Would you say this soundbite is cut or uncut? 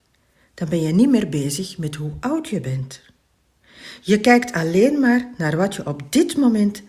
uncut